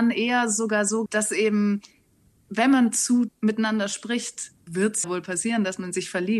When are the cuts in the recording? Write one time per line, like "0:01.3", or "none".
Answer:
0:01.1
0:03.3
0:04.7
0:05.0